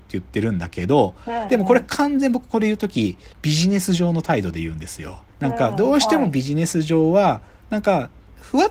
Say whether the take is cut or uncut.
cut